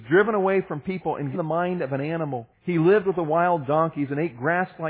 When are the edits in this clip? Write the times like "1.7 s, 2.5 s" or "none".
1.3 s, 2.5 s